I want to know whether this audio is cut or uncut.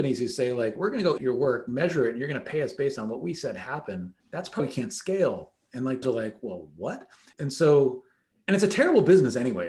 cut